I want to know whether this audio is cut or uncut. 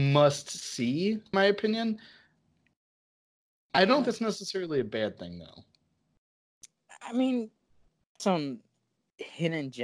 cut